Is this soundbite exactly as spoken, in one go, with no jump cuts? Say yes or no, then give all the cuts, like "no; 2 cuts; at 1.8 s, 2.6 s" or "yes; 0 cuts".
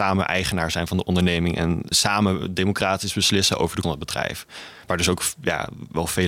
no; 2 cuts; at 1.9 s, 3.8 s